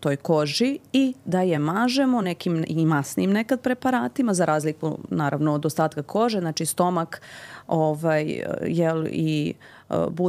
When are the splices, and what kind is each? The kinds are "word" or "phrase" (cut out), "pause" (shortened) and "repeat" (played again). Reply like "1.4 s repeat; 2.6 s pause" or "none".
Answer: none